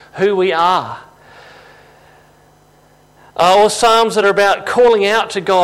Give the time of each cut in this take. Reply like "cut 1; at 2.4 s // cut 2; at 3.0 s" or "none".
none